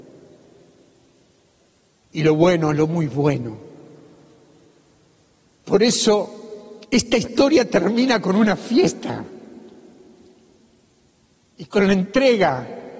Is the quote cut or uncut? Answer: cut